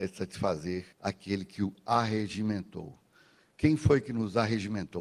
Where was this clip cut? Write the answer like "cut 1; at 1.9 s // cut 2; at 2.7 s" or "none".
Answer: cut 1; at 0.9 s